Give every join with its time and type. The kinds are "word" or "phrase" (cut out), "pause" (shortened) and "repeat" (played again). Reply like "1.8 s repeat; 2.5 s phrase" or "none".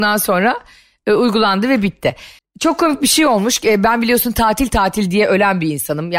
2.4 s pause